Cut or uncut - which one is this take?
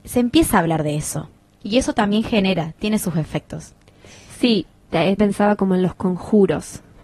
cut